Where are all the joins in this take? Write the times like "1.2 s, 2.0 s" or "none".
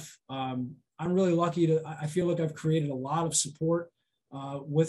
none